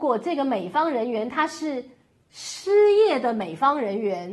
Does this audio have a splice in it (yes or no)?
no